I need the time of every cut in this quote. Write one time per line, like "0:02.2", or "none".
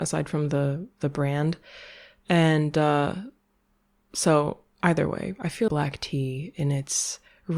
0:05.7